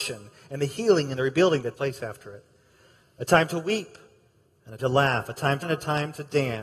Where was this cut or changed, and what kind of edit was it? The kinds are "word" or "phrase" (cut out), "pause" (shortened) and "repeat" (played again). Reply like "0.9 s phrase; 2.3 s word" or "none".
1.7 s word; 4.8 s word; 5.6 s word

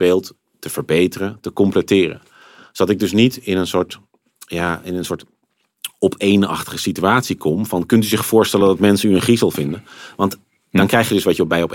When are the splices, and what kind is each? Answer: none

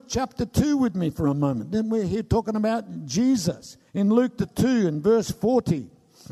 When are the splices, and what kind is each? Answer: 3.9 s pause; 4.4 s word

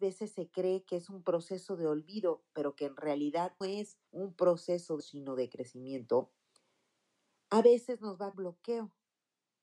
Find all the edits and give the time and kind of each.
3.6 s word; 4.1 s pause; 5.0 s word; 8.3 s phrase

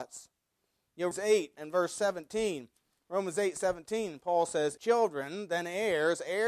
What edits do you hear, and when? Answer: 1.1 s word; 1.6 s word; 4.8 s word

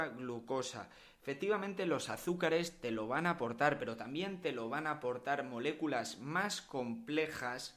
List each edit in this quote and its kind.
none

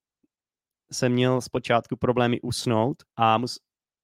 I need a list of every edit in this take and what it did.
3.1 s pause

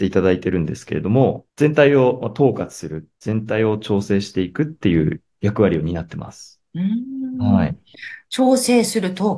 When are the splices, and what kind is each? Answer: 1.5 s pause; 3.2 s pause

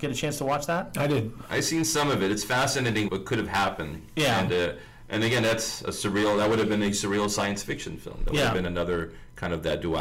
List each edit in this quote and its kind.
3.1 s word

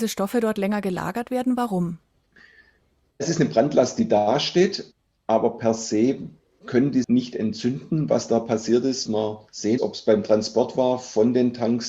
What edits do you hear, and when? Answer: 7.0 s word; 9.1 s word

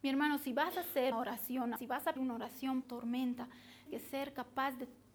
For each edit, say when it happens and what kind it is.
1.1 s word; 1.8 s word; 2.2 s word; 2.8 s word; 3.9 s word

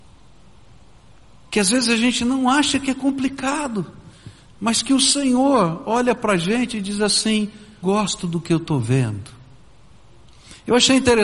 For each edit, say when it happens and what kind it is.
7.8 s word

